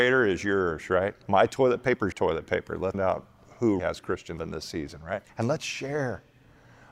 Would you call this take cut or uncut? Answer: cut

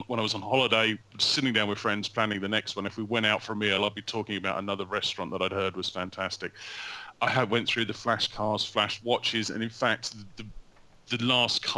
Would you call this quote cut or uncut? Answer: uncut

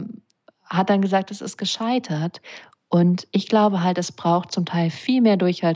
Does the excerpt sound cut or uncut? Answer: uncut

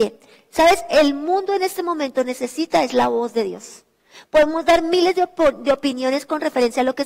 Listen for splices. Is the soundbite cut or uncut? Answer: uncut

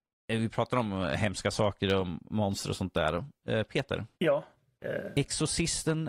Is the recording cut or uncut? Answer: uncut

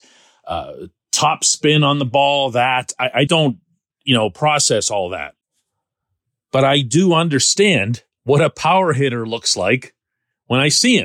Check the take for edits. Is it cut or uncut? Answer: cut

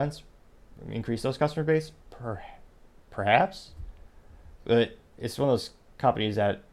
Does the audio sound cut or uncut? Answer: uncut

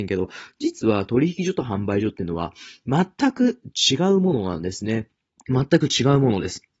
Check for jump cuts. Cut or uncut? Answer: cut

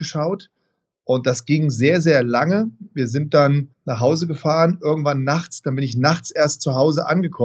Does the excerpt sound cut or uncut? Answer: cut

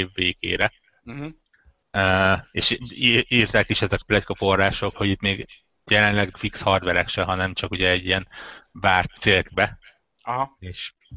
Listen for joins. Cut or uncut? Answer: cut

